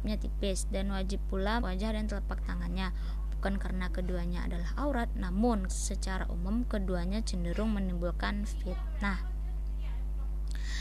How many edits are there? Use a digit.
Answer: 2